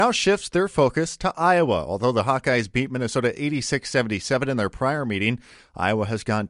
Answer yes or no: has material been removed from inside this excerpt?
no